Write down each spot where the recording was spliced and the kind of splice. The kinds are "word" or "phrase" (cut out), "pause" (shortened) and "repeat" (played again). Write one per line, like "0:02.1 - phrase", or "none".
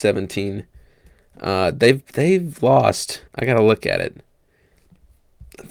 0:03.3 - pause

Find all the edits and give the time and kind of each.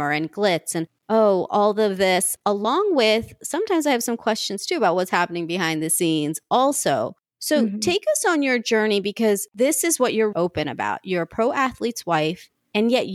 0:09.5 - pause
0:10.3 - word

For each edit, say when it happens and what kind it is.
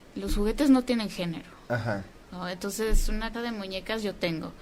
0:03.3 - word

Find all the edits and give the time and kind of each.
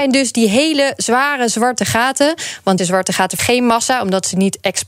0:02.8 - word
0:03.4 - word

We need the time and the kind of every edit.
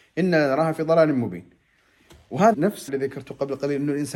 0:02.5 - word
0:02.9 - word

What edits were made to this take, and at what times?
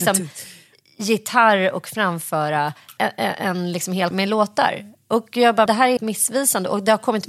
0:03.0 - word
0:04.1 - word
0:05.7 - word
0:06.0 - word

